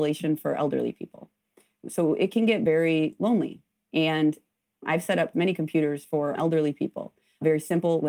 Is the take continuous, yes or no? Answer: yes